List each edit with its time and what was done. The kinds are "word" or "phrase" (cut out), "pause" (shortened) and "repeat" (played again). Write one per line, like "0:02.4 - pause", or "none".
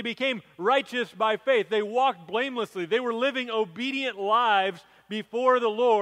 none